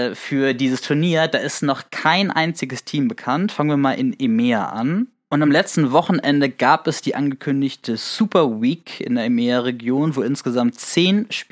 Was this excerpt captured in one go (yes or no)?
yes